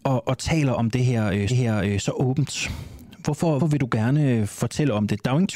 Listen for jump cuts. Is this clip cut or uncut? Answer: cut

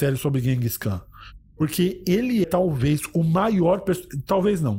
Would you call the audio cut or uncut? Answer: cut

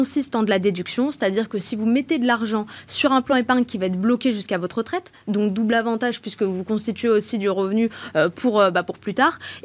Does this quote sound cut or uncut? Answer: uncut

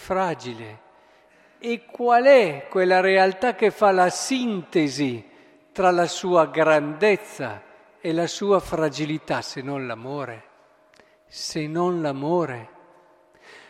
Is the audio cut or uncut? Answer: uncut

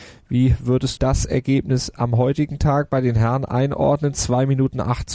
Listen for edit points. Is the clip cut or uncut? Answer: cut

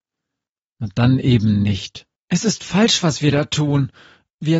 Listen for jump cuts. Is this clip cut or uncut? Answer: cut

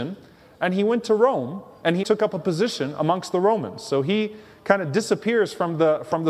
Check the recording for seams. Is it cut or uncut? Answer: cut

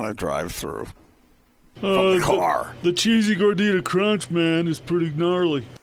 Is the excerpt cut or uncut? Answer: uncut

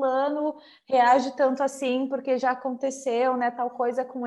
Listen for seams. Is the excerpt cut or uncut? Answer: uncut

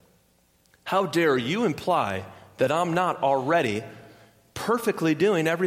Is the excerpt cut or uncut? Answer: uncut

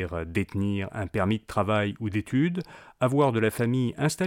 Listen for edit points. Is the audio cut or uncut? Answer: uncut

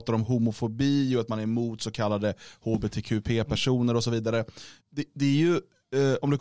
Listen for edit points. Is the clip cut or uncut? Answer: cut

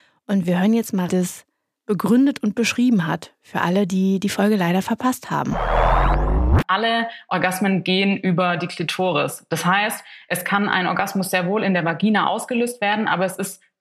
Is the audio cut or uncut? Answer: cut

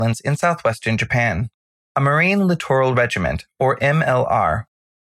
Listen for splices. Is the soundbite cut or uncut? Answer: uncut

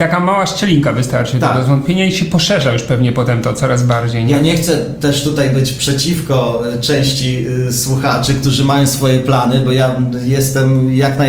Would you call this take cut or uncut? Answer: uncut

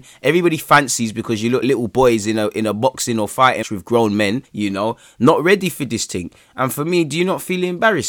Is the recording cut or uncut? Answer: cut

